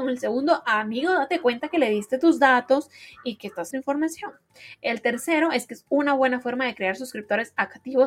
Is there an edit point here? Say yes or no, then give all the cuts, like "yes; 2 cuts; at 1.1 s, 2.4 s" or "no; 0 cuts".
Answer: yes; 1 cut; at 3.7 s